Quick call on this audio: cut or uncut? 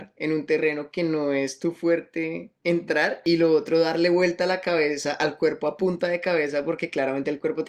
uncut